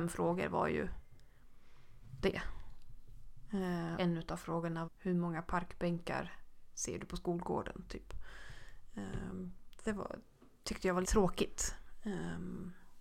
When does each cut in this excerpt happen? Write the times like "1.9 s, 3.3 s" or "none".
2.2 s, 4.0 s, 4.9 s, 9.9 s, 11.0 s